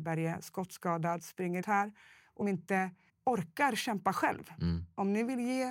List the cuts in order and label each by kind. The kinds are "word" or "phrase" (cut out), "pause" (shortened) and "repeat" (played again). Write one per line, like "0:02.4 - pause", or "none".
0:01.6 - word
0:02.4 - word
0:03.1 - pause

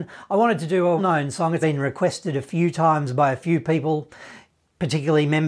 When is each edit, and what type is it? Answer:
0:01.0 - word
0:01.6 - word

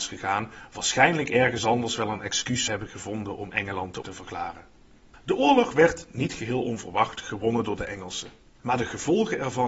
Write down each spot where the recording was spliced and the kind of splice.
0:02.7 - word
0:04.0 - word

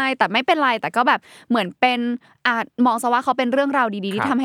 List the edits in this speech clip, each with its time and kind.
none

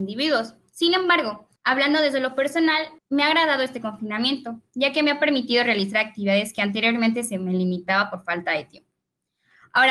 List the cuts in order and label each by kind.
0:01.6 - pause
0:03.0 - pause

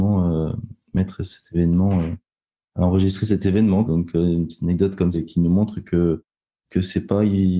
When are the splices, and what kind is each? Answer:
0:03.8 - word
0:05.1 - word

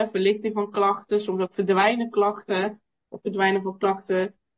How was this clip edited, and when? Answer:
0:02.1 - word
0:03.2 - word

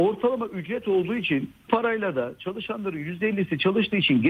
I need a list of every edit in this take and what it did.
0:01.7 - word

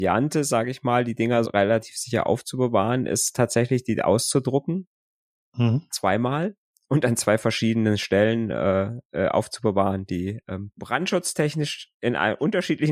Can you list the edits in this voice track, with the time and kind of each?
0:01.4 - word

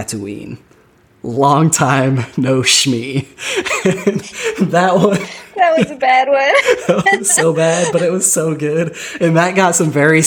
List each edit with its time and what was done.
none

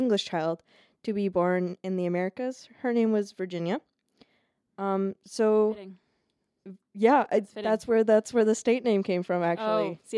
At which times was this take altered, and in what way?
none

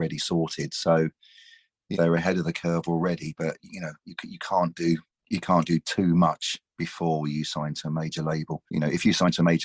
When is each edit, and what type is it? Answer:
0:01.9 - word
0:03.6 - word
0:08.7 - pause

